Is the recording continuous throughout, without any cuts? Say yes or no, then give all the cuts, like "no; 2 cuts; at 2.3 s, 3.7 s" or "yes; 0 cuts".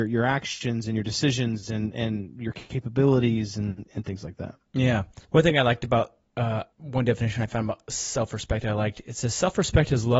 no; 2 cuts; at 5.2 s, 6.7 s